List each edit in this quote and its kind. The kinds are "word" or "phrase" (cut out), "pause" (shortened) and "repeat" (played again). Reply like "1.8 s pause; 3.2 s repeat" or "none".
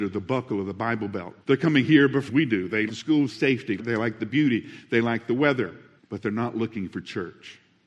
1.4 s pause; 2.3 s phrase; 2.9 s word; 3.3 s phrase; 3.8 s word; 6.0 s pause